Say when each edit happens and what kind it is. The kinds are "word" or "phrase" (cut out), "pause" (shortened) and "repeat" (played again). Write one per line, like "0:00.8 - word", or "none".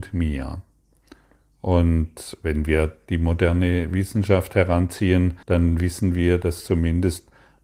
0:05.4 - pause